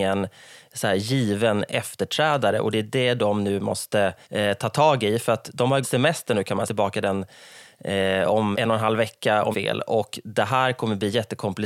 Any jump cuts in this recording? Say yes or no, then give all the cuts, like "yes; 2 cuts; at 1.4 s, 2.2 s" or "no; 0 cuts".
yes; 5 cuts; at 4.2 s, 5.8 s, 6.7 s, 8.5 s, 9.5 s